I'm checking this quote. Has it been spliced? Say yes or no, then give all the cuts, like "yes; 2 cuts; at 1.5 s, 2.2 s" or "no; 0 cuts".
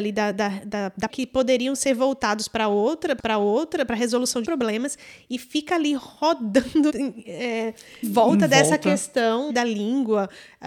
yes; 6 cuts; at 1.1 s, 3.2 s, 4.4 s, 6.9 s, 8.0 s, 9.5 s